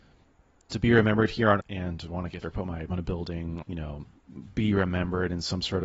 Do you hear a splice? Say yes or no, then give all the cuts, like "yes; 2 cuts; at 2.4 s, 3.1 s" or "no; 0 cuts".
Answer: yes; 4 cuts; at 1.6 s, 2.4 s, 2.9 s, 3.6 s